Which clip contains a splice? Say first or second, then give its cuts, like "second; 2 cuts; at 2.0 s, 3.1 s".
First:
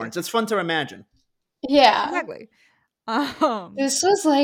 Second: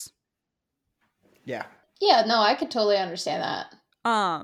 second; 1 cut; at 1.8 s